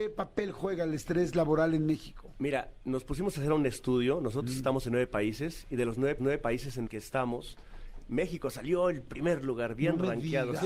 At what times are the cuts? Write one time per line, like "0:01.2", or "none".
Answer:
0:06.2
0:06.9